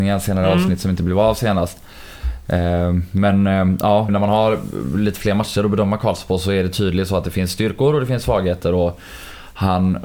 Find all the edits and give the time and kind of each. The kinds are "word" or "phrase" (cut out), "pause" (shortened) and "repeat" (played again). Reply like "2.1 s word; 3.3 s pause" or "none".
4.1 s word

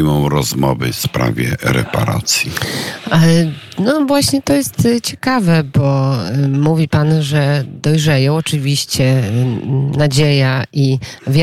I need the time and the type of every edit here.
none

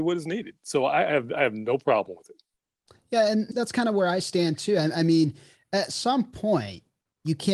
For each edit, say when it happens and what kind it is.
3.5 s word

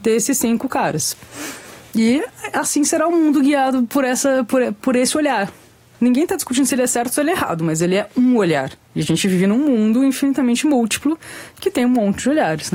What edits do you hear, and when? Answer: none

